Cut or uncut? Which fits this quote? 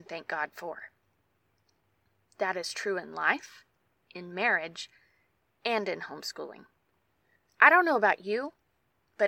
uncut